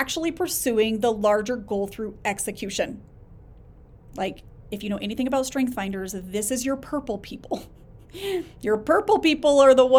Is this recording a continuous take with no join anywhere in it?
yes; 0 cuts

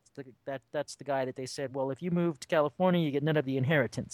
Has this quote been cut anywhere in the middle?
no; 0 cuts

